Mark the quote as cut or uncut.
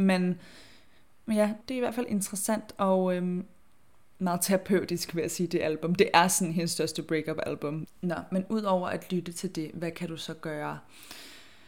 cut